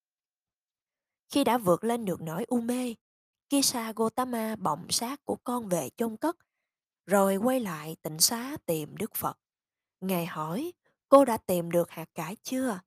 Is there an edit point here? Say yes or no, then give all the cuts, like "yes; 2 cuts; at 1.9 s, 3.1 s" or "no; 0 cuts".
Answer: no; 0 cuts